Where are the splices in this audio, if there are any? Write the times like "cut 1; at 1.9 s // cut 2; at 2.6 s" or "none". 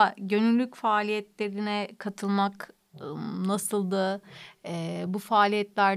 none